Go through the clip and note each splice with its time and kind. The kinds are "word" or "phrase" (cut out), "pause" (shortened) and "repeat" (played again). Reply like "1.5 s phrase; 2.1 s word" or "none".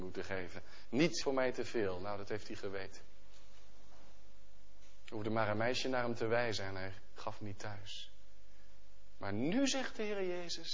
1.2 s word